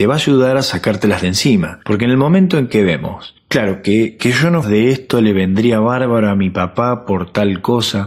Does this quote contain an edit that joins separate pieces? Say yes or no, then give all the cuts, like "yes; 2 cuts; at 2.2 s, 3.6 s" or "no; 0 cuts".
yes; 1 cut; at 4.6 s